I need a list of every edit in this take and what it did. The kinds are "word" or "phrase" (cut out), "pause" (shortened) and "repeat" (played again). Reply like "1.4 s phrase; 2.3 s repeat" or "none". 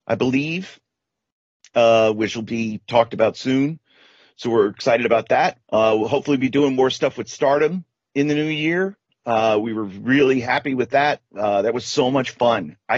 5.6 s pause